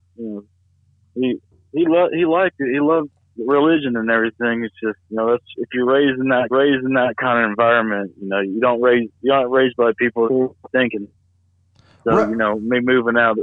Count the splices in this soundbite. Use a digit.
3